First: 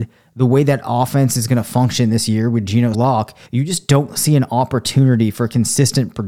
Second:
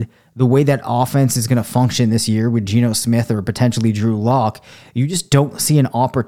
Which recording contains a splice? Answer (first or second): first